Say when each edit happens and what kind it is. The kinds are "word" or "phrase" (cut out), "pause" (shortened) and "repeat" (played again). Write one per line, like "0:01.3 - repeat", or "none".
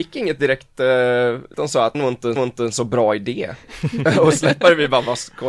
0:01.5 - word
0:01.9 - phrase
0:02.4 - repeat